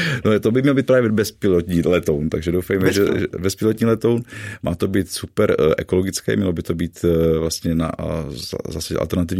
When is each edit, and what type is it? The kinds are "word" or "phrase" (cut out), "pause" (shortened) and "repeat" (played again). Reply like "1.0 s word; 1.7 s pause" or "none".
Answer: none